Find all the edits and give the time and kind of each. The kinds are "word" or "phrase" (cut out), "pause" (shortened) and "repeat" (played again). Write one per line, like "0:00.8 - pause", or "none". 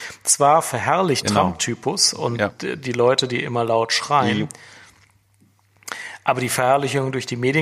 0:01.2 - phrase